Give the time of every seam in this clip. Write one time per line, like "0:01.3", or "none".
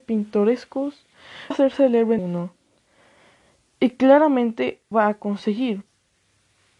0:01.5
0:02.2
0:04.9